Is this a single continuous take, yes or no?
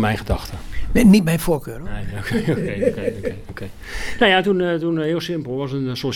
yes